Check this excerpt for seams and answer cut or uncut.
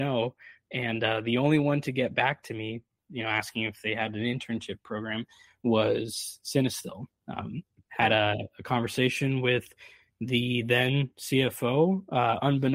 uncut